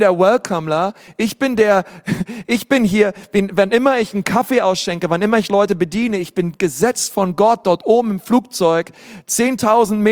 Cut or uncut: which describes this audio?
uncut